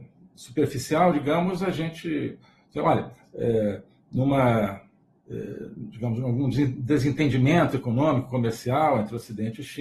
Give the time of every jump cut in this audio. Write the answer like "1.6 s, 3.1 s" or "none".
none